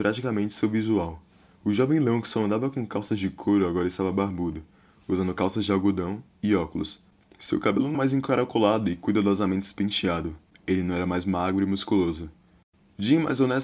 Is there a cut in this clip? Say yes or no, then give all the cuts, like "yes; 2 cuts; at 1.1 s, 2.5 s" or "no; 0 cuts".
yes; 1 cut; at 7.9 s